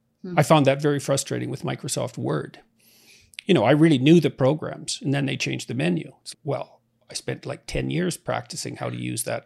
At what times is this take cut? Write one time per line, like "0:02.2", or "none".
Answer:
0:06.3

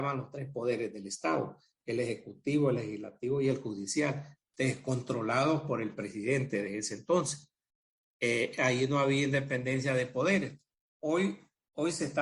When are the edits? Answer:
none

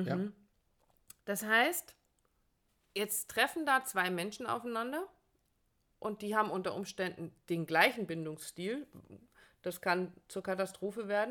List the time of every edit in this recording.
0:01.2
0:02.7

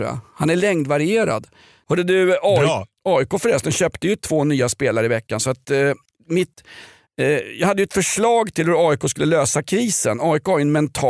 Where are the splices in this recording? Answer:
none

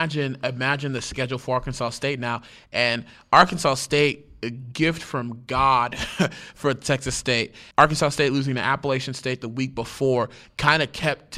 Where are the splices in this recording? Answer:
0:07.7

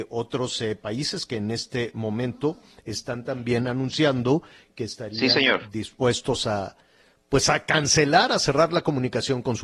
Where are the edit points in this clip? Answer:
none

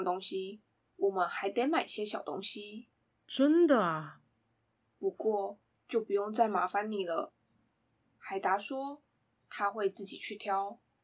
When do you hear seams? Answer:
none

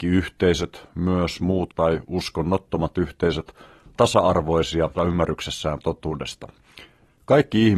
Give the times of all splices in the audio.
0:01.7
0:03.9
0:05.0

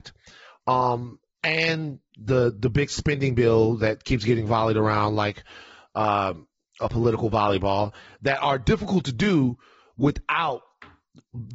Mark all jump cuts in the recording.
none

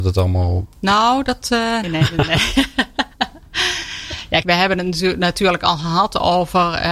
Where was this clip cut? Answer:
0:01.8
0:04.4

